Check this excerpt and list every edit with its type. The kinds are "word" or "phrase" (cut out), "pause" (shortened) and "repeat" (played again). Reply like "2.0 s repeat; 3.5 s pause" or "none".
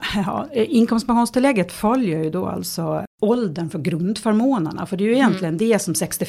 none